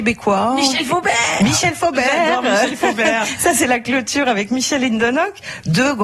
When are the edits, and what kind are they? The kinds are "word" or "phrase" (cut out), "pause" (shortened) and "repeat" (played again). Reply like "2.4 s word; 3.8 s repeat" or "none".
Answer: none